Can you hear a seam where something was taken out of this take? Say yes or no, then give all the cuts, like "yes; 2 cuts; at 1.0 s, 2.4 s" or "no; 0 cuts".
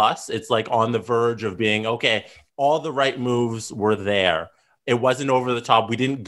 no; 0 cuts